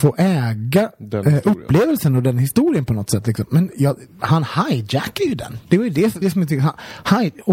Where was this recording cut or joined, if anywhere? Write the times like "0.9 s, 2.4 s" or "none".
6.2 s